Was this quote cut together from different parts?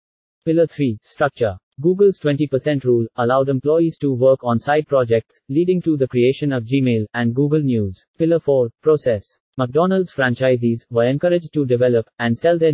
yes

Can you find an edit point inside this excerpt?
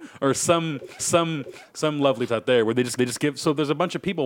yes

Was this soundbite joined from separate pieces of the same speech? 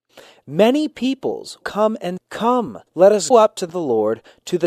yes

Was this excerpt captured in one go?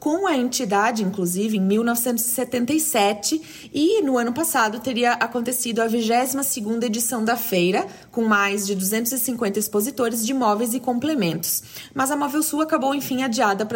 yes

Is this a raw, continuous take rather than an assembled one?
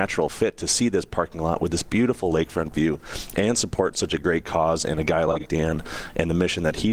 yes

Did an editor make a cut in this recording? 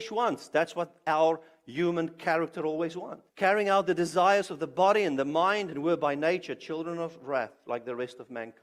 yes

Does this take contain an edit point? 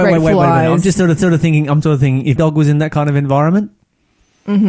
yes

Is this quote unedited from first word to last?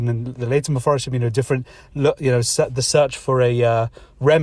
yes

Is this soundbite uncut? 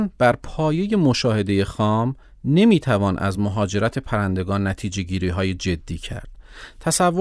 yes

